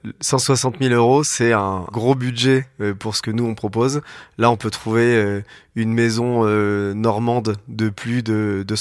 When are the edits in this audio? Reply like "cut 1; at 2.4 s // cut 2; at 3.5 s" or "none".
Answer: none